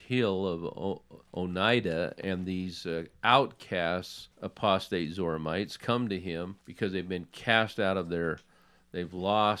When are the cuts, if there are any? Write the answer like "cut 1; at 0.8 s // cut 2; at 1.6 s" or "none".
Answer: cut 1; at 1.3 s // cut 2; at 4.3 s // cut 3; at 6.6 s

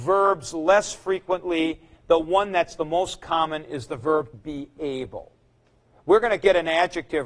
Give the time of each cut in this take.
cut 1; at 4.3 s

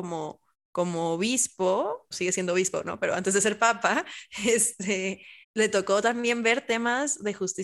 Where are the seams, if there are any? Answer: cut 1; at 2.1 s // cut 2; at 5.4 s

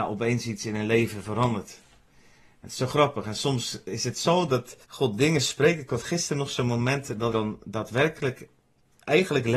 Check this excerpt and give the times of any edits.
cut 1; at 4.8 s // cut 2; at 7.3 s

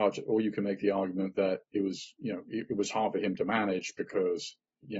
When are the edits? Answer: none

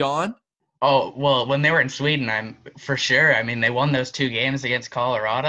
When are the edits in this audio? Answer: none

